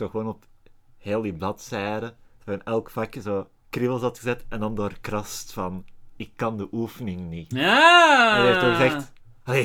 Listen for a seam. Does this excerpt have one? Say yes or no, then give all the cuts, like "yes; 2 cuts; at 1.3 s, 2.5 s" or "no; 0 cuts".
yes; 1 cut; at 3.6 s